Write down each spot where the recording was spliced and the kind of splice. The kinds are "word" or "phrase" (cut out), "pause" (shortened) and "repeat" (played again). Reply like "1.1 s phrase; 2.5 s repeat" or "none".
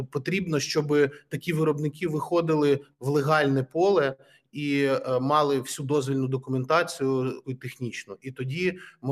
7.4 s word

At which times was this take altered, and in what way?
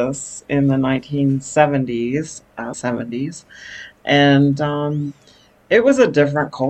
2.7 s word

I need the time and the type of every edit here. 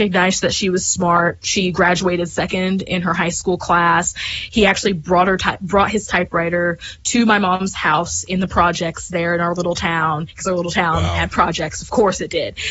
none

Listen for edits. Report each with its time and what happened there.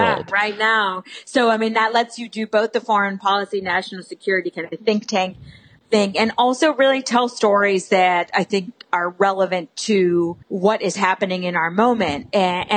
10.4 s pause

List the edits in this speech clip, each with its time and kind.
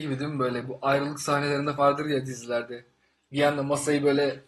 1.8 s word

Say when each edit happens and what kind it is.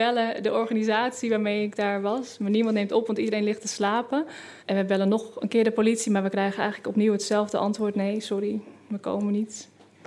4.6 s pause

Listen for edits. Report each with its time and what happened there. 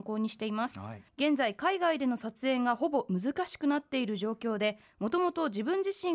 1.1 s pause

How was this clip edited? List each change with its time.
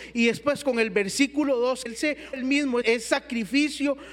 1.9 s word; 2.3 s word; 2.8 s word

